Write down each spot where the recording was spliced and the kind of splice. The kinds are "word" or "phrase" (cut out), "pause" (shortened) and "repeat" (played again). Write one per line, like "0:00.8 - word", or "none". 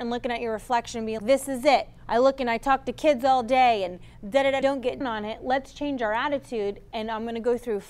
0:01.2 - word
0:02.0 - pause
0:04.6 - phrase
0:05.0 - word